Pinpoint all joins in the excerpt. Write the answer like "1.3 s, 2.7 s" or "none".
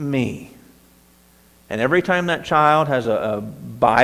none